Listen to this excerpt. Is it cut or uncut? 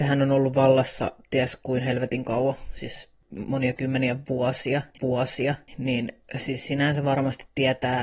cut